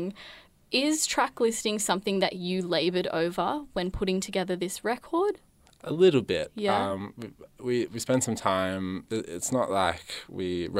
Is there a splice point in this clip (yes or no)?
no